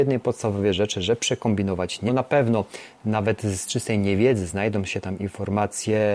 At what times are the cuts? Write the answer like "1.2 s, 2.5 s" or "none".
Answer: 2.1 s